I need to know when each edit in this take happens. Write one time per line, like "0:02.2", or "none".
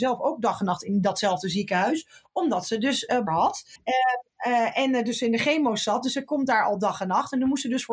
0:03.3